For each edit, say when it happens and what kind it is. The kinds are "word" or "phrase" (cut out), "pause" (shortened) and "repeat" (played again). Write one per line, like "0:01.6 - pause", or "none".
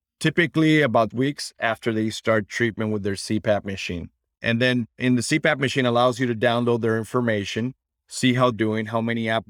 0:01.1 - word
0:08.5 - word